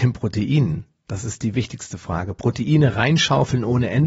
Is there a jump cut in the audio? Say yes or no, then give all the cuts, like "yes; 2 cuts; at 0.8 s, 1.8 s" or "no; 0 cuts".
no; 0 cuts